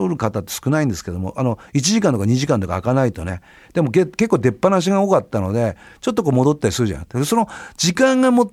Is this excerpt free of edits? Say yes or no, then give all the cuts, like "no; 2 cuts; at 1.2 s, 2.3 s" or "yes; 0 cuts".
yes; 0 cuts